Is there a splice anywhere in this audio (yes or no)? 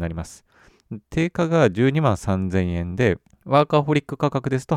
yes